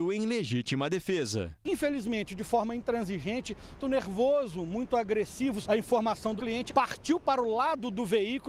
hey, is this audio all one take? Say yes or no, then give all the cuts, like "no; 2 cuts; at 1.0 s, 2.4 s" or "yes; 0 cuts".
no; 4 cuts; at 3.8 s, 5.6 s, 6.4 s, 6.7 s